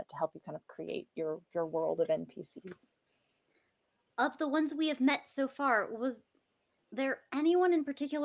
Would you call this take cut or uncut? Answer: uncut